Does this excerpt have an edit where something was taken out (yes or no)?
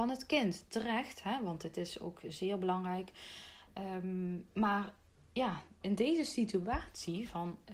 no